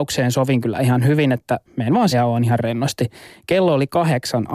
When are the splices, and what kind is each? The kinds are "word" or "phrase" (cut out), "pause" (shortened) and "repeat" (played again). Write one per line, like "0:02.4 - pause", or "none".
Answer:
0:01.7 - pause
0:02.1 - word